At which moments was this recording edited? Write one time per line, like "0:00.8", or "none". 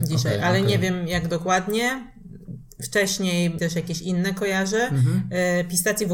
0:03.6